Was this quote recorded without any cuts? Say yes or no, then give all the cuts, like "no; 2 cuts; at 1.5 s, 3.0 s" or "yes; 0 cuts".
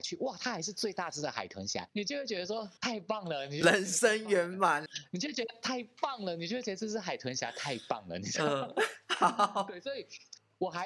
no; 3 cuts; at 1.9 s, 2.8 s, 4.9 s